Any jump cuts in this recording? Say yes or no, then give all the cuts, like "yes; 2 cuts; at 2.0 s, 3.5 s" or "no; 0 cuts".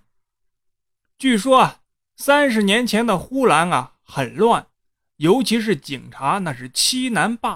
no; 0 cuts